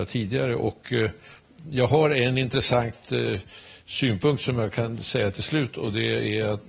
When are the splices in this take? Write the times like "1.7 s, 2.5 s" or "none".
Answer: none

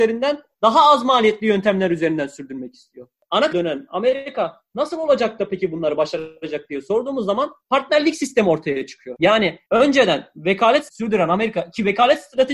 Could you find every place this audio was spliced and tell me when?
3.5 s, 10.9 s

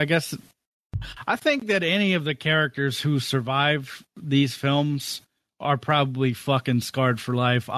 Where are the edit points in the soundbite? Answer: none

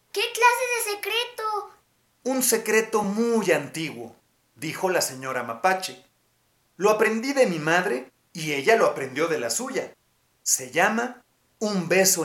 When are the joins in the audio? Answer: none

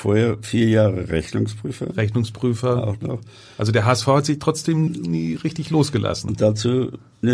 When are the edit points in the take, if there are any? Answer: 4.9 s

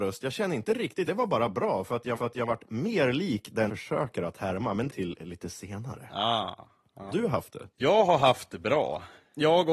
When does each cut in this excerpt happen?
1.1 s, 2.2 s, 3.7 s, 4.9 s, 7.1 s, 7.7 s

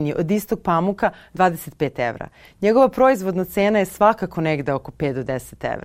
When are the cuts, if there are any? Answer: none

